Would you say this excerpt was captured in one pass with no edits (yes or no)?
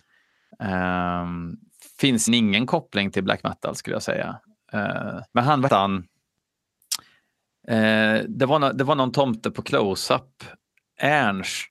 no